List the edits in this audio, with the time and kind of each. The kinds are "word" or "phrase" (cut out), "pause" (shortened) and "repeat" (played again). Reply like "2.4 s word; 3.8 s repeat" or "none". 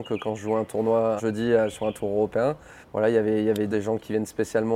1.2 s word; 2.8 s pause; 3.7 s phrase

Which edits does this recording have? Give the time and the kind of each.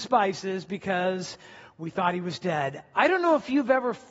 none

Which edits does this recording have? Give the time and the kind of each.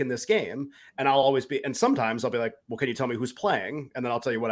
none

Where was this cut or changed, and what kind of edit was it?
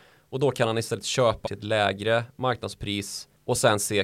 1.5 s word

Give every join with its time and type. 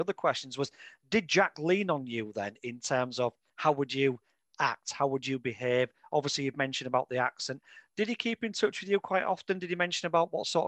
none

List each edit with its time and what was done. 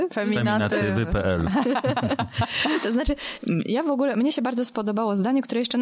none

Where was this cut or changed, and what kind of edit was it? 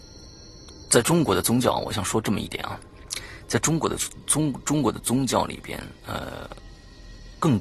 6.0 s pause

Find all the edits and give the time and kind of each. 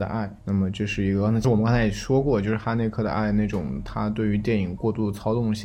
none

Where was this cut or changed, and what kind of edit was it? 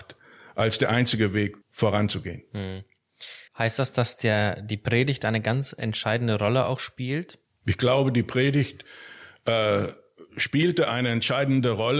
1.6 s pause; 3.5 s pause; 7.4 s pause; 10.3 s pause

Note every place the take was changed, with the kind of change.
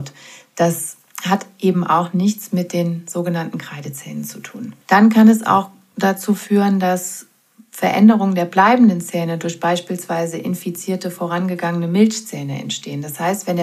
4.8 s pause

